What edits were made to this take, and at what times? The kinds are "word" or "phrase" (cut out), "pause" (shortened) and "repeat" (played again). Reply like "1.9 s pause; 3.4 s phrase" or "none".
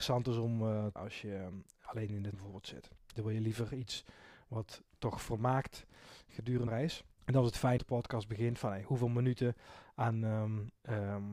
1.0 s word; 2.3 s word; 3.0 s pause; 4.9 s pause; 6.7 s word; 7.1 s pause; 7.8 s phrase